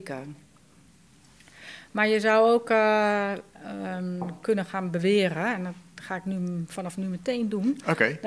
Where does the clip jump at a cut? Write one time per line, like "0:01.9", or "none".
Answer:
none